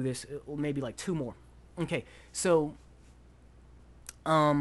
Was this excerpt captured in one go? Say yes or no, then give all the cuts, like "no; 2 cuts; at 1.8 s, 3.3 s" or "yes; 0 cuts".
yes; 0 cuts